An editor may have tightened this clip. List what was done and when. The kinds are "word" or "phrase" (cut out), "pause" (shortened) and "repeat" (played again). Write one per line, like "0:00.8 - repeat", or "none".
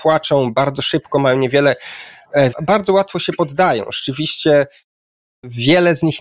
0:02.5 - phrase